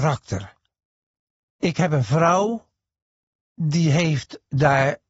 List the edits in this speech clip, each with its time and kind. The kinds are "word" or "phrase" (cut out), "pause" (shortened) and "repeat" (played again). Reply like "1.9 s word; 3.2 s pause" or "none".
none